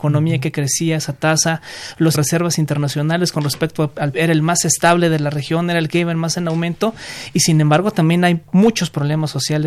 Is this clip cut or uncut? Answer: cut